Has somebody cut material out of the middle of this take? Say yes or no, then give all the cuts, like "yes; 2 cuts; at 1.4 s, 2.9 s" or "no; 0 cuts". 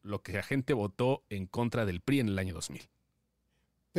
no; 0 cuts